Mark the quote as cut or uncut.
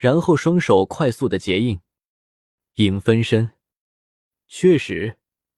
uncut